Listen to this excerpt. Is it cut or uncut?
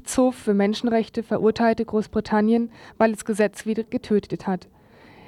uncut